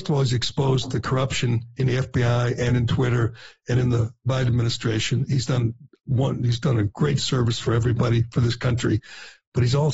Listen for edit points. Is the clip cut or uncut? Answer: uncut